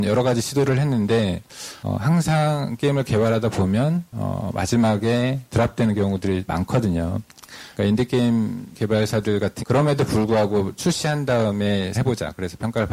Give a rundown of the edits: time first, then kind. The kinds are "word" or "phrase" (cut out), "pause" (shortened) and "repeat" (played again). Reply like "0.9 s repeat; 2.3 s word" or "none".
6.5 s word; 9.6 s word; 10.8 s word; 11.9 s phrase